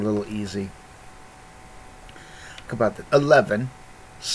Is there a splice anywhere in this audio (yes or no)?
yes